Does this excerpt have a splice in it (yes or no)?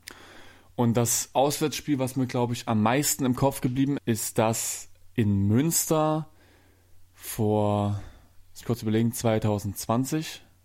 yes